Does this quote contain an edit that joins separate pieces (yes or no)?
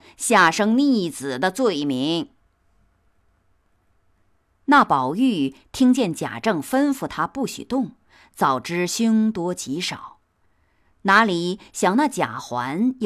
no